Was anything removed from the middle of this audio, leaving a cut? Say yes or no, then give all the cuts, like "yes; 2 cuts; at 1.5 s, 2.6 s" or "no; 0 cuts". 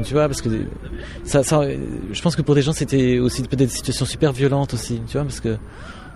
no; 0 cuts